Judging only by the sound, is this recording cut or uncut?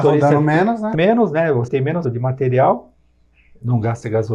cut